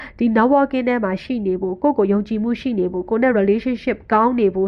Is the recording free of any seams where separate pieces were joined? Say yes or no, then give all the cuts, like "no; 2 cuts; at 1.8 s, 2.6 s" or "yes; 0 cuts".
yes; 0 cuts